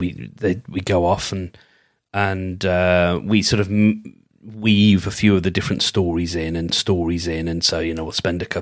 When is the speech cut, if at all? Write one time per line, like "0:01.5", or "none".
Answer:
0:06.7